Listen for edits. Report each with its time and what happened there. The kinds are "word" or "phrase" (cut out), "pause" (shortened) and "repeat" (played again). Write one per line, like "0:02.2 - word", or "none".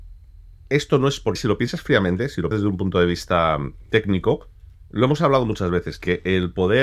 0:01.4 - word
0:02.5 - word